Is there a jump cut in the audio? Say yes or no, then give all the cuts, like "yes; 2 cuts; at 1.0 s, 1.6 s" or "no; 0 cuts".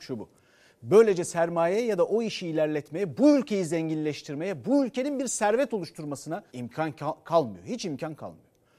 yes; 1 cut; at 6.5 s